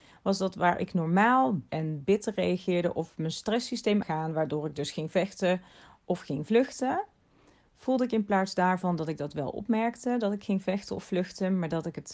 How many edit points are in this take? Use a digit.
2